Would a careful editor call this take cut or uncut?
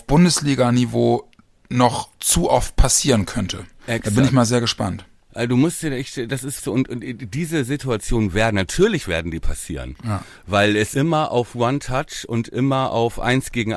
cut